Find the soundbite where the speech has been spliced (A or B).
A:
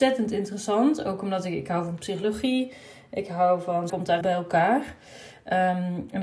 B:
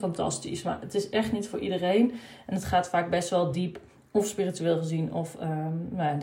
A